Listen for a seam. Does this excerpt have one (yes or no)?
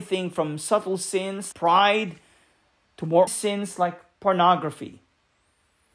yes